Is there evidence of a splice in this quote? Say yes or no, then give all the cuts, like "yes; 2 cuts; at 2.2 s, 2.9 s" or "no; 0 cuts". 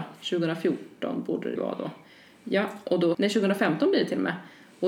yes; 2 cuts; at 1.6 s, 3.1 s